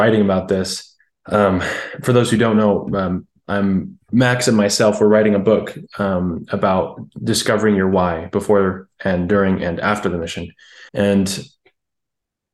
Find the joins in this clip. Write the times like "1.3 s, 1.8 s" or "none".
1.0 s, 10.9 s